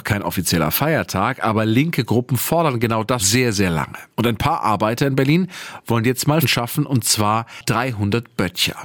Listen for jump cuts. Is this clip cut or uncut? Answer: cut